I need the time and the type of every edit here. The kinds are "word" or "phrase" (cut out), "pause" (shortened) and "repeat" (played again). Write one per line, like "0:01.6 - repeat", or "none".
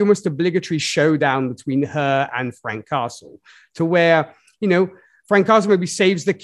none